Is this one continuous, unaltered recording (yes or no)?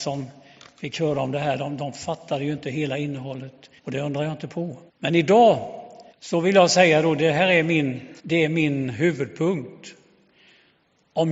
no